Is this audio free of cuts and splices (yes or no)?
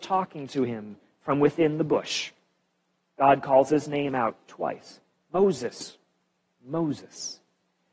yes